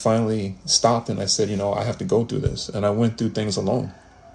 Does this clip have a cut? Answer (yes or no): no